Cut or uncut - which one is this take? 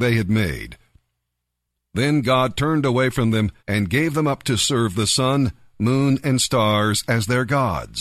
cut